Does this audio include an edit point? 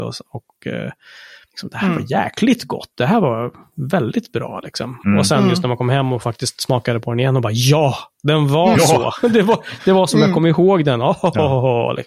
no; 0 cuts

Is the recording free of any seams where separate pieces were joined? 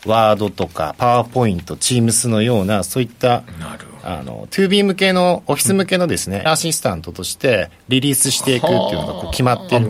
no; 1 cut; at 6.5 s

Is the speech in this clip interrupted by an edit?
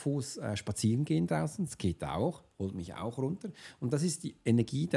no; 0 cuts

